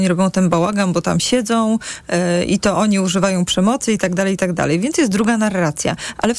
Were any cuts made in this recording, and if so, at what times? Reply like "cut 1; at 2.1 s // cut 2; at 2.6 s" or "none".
none